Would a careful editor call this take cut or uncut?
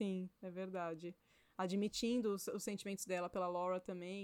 uncut